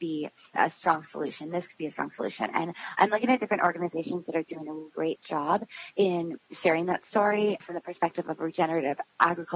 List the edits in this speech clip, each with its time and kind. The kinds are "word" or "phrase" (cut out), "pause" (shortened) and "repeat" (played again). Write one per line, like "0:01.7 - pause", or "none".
0:04.9 - word